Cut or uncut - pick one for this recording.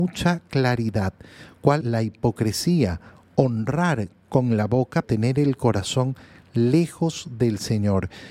cut